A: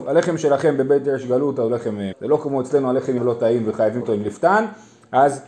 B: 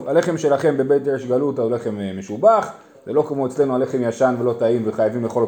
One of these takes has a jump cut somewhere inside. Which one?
A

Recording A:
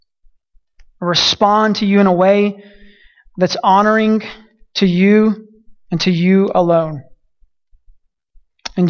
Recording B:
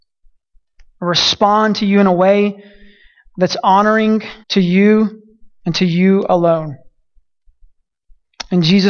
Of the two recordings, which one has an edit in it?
B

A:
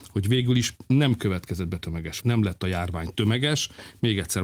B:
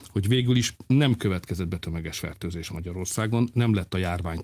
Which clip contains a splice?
A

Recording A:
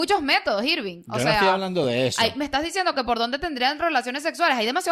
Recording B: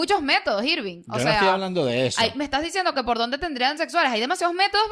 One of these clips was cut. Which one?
B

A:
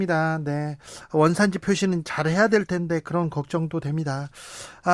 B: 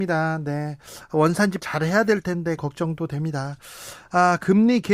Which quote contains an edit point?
B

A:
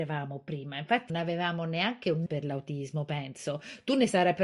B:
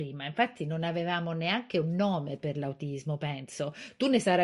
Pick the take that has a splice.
A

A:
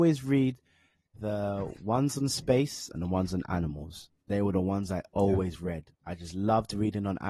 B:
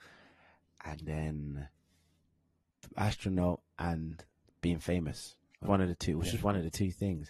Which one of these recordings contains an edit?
B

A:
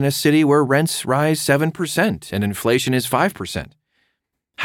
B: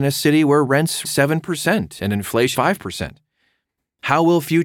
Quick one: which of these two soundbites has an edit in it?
B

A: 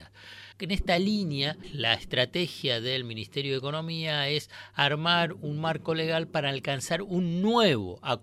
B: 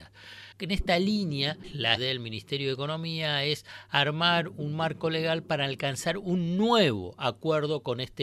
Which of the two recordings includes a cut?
B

